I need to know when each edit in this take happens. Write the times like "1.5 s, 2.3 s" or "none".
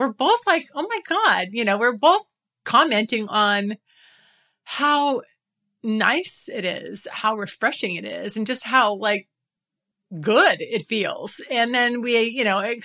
none